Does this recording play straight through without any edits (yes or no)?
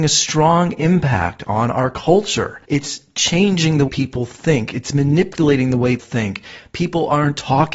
no